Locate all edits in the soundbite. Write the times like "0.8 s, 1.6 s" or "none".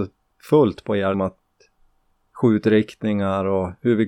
1.1 s